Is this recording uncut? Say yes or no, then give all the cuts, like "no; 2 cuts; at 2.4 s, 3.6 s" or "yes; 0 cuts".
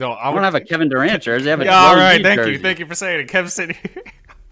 yes; 0 cuts